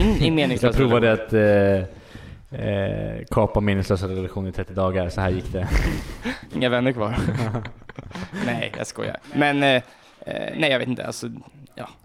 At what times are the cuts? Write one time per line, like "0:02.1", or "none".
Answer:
0:09.2